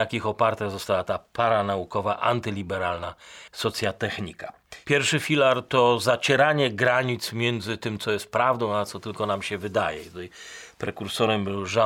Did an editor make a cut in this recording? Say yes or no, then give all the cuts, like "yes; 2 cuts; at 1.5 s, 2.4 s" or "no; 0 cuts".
yes; 1 cut; at 3.5 s